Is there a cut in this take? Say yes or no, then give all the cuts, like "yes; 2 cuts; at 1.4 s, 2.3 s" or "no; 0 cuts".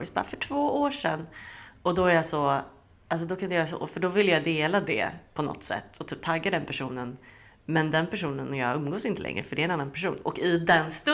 no; 0 cuts